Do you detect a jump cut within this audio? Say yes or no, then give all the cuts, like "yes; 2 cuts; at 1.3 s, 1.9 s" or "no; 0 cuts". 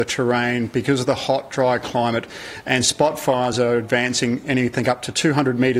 no; 0 cuts